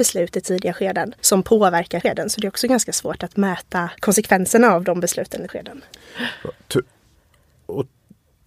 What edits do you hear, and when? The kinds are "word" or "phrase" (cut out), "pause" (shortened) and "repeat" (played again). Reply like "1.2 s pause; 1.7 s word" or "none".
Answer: 1.2 s pause; 2.0 s word; 4.0 s pause; 5.5 s word